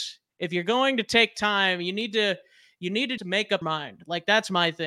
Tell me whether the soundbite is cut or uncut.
cut